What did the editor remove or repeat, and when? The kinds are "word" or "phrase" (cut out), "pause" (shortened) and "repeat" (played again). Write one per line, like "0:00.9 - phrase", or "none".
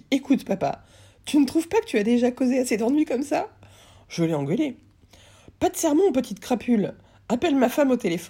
none